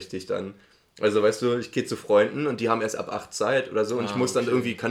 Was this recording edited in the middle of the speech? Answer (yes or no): no